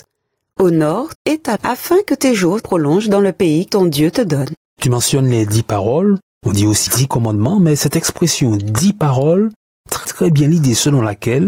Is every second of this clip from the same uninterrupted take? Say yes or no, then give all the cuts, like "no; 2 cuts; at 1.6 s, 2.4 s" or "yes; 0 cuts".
no; 6 cuts; at 1.2 s, 1.6 s, 2.6 s, 3.7 s, 6.9 s, 10.0 s